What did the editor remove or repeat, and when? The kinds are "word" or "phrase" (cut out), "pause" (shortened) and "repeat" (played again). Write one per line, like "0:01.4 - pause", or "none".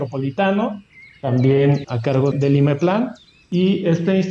0:01.8 - word
0:02.3 - word